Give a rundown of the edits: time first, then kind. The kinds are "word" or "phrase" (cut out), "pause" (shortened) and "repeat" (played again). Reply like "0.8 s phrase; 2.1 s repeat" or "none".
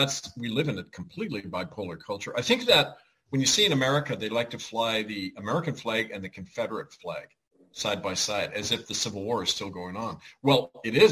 none